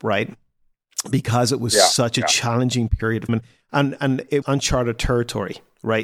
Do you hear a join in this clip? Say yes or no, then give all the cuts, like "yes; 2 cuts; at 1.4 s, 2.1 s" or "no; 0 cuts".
yes; 2 cuts; at 3.3 s, 4.4 s